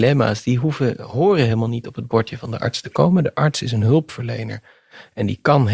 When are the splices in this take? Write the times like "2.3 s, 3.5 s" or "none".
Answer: none